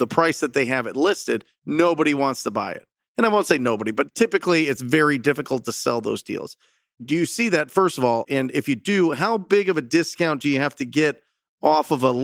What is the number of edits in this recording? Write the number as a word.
zero